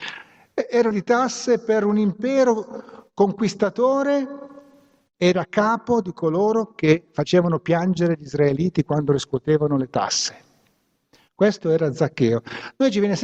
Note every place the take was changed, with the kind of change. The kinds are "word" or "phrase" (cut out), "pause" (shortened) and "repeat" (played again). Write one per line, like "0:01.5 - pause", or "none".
0:00.9 - word